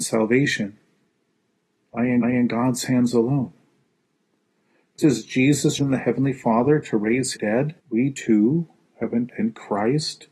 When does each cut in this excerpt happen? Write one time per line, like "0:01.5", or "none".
0:02.2
0:05.0
0:05.8
0:07.4
0:07.8
0:09.3